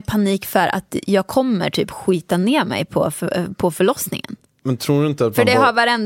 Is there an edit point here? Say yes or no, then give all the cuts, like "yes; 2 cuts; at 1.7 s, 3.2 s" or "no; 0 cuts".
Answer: no; 0 cuts